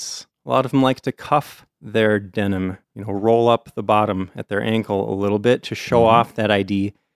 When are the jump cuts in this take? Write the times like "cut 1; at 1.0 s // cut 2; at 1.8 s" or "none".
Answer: cut 1; at 2.8 s